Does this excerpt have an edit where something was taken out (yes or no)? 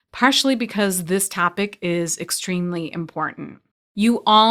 no